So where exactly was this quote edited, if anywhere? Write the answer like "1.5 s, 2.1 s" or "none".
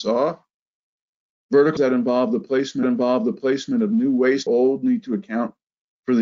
1.8 s, 2.8 s, 4.5 s